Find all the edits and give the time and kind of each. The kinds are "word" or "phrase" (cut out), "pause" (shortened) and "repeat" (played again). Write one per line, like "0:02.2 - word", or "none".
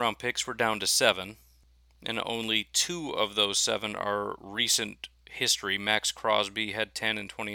none

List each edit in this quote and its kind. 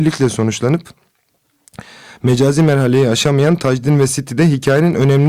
none

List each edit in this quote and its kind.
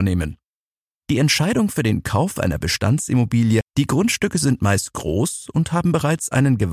0:03.6 - phrase

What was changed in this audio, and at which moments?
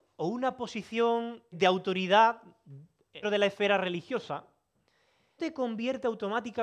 0:01.5 - word
0:03.2 - word
0:05.4 - word

